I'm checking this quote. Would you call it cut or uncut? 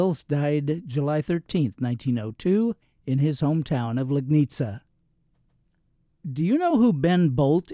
uncut